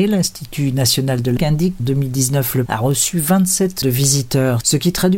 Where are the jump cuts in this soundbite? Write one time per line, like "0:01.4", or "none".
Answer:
0:01.4
0:01.8
0:02.7
0:03.8